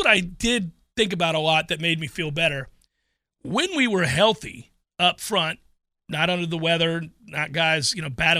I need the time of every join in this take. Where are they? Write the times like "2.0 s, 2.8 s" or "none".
none